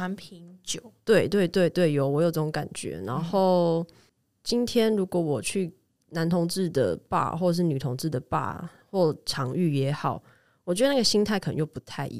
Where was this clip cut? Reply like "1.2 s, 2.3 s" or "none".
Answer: none